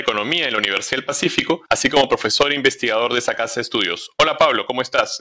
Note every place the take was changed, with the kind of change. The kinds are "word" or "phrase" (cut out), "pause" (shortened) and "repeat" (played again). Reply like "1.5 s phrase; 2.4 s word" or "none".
1.7 s pause